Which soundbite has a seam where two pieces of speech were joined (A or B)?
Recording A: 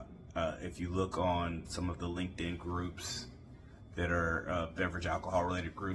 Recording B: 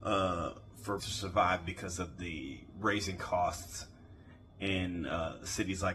B